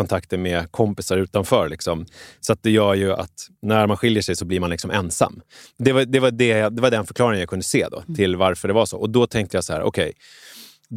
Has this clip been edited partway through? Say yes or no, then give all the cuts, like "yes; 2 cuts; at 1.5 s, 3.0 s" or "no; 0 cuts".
no; 0 cuts